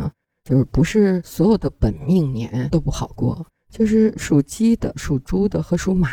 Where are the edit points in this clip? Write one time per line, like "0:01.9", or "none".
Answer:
0:04.9

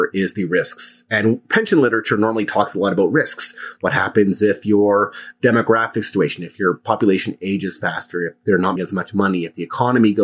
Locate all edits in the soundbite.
0:08.8

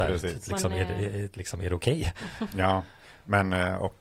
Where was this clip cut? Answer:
none

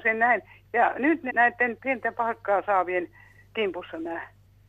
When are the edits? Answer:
0:01.3
0:01.8

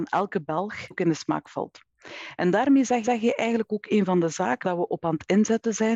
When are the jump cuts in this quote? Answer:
0:00.9
0:03.0
0:04.6

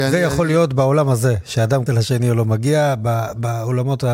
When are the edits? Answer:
0:01.9

